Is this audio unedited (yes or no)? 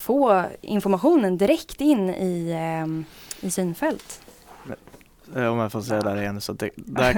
yes